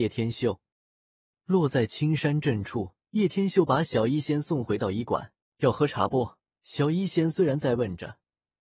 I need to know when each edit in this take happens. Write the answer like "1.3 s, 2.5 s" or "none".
3.0 s, 5.4 s, 6.5 s